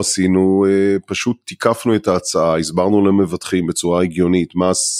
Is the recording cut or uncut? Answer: uncut